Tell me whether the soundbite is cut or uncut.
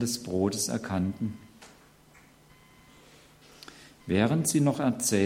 uncut